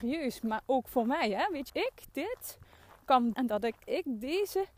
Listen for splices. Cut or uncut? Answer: cut